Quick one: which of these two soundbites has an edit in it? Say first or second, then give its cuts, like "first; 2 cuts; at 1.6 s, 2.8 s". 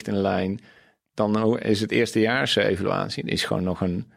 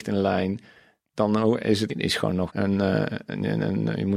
second; 2 cuts; at 1.9 s, 2.5 s